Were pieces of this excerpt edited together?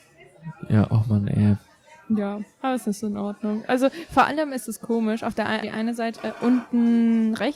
yes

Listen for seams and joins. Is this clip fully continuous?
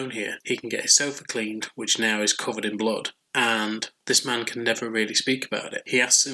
yes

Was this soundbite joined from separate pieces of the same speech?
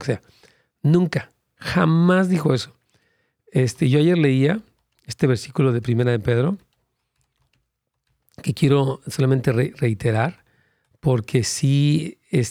no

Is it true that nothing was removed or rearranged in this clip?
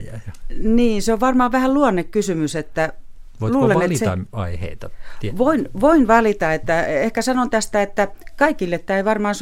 yes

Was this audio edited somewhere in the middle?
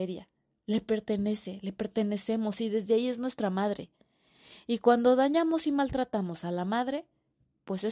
no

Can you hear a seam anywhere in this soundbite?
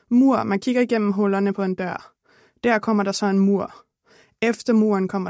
no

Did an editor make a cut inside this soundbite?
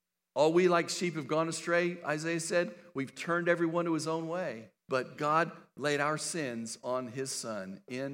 yes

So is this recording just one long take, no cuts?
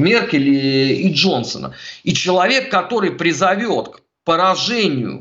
yes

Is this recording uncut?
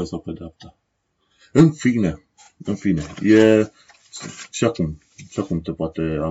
yes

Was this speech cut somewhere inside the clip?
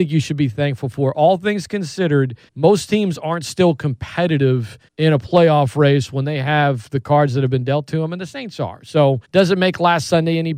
yes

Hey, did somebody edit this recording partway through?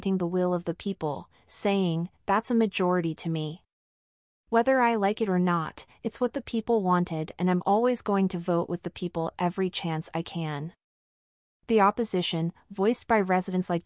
no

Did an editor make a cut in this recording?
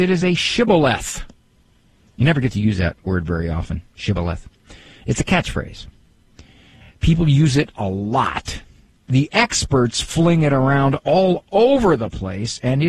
no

